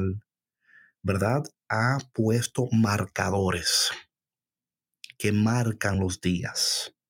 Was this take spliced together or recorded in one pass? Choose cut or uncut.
uncut